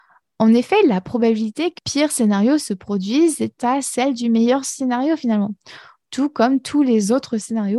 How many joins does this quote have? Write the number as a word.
two